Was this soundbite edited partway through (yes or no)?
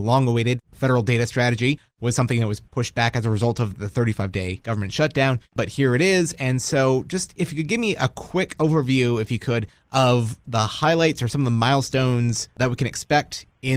no